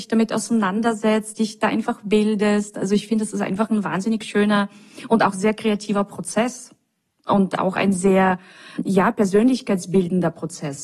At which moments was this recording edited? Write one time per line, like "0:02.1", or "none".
none